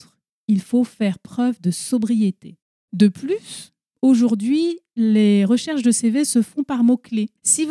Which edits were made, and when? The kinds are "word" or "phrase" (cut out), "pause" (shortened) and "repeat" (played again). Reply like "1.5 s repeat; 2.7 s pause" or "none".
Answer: none